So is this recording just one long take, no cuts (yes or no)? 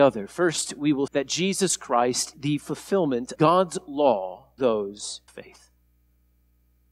no